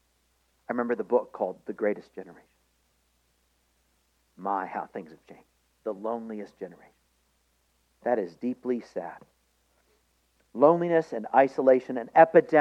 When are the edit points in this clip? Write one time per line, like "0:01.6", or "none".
0:05.5